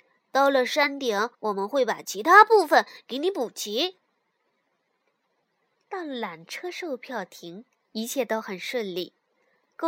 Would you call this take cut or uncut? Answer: cut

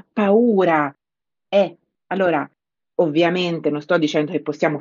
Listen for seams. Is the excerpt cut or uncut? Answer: cut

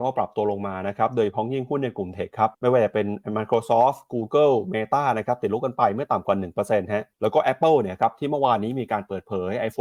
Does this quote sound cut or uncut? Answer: cut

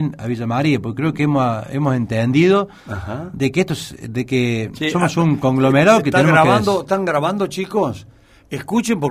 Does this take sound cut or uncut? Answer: uncut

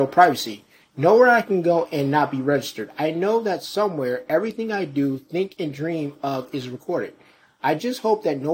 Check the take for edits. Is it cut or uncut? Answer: uncut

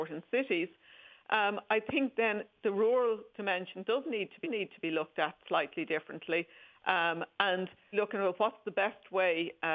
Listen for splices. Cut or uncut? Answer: cut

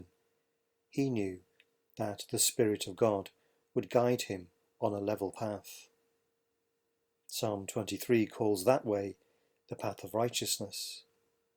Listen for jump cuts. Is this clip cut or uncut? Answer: uncut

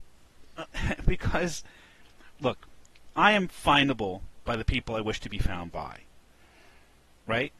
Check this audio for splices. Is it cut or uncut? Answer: uncut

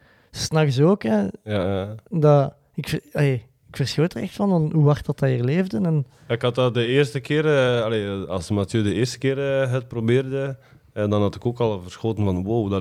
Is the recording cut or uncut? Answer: uncut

